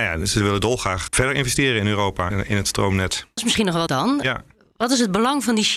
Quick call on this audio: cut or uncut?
cut